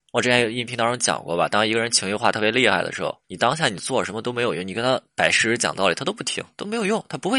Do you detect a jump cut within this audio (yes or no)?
yes